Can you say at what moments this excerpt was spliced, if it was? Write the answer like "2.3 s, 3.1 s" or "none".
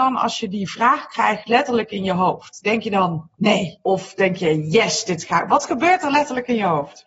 none

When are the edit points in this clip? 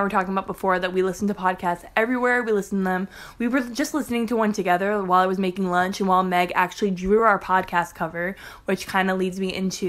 none

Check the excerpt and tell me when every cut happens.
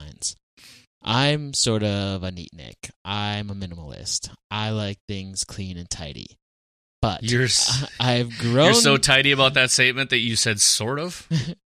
none

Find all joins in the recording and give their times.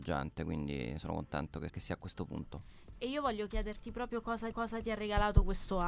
1.7 s, 4.5 s

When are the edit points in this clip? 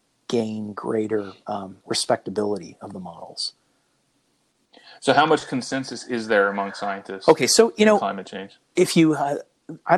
1.8 s

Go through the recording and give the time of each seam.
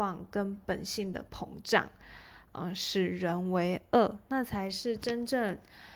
none

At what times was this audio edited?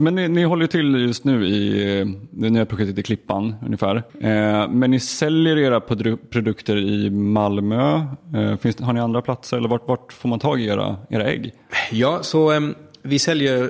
4.1 s

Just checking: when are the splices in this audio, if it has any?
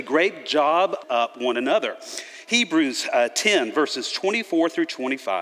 1.0 s

